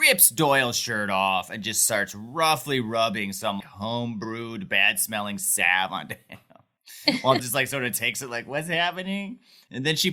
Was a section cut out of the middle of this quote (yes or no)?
yes